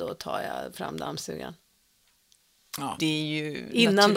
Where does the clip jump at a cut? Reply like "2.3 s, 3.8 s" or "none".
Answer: 3.0 s